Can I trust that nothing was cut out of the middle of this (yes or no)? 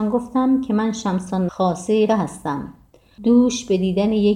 no